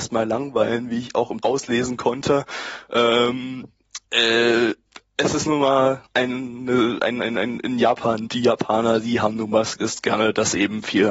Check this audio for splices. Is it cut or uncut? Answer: cut